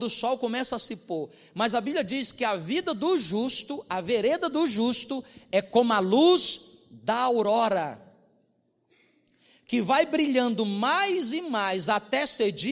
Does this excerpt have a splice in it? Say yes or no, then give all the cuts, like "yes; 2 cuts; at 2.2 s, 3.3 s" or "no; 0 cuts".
no; 0 cuts